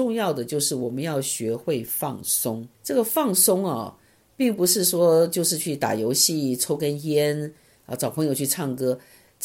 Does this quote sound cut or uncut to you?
cut